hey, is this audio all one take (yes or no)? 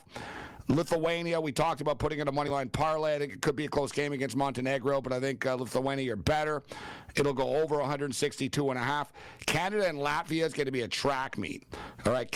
yes